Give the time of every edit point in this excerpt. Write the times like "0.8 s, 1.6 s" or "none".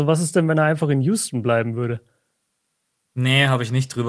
none